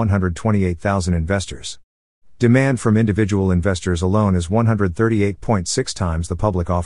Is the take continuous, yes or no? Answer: yes